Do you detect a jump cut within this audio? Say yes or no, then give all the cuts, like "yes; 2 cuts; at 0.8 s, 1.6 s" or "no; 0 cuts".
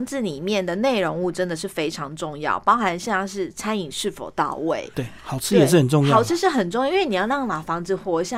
yes; 1 cut; at 4.9 s